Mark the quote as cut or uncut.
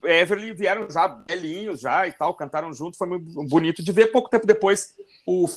uncut